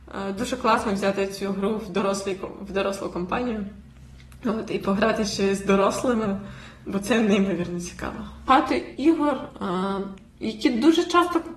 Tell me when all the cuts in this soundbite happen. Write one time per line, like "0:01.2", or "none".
0:10.3